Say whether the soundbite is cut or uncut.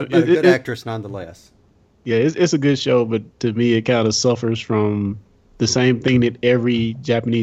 uncut